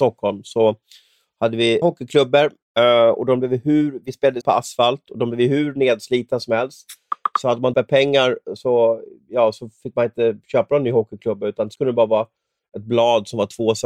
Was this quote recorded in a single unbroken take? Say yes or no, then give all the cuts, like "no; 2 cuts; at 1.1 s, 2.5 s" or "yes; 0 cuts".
no; 5 cuts; at 1.8 s, 4.4 s, 7.7 s, 8.6 s, 11.7 s